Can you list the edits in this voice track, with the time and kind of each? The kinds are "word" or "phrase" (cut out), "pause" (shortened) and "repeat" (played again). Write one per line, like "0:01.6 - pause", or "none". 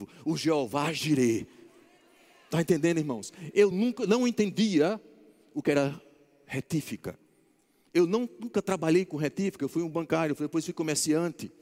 none